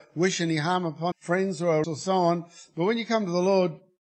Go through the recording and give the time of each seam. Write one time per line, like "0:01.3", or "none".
0:01.1
0:01.8